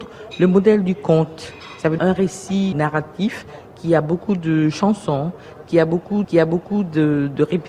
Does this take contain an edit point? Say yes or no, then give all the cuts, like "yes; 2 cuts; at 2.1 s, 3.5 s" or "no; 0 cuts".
yes; 3 cuts; at 2.0 s, 2.7 s, 6.2 s